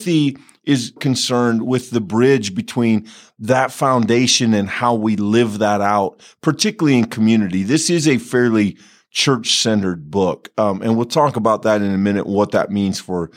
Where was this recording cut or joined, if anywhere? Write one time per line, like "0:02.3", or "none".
0:01.0